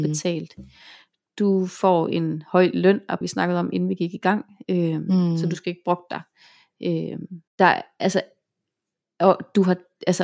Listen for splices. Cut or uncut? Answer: cut